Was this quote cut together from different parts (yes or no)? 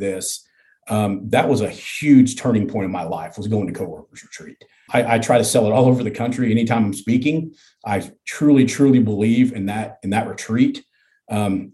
no